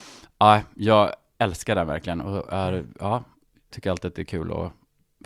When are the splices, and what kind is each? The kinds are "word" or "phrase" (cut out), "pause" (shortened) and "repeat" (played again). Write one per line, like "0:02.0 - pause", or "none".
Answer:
0:03.7 - phrase